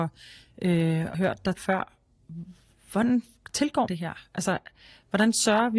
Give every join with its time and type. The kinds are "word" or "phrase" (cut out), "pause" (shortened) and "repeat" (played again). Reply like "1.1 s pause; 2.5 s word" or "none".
1.1 s word; 1.6 s word; 3.9 s word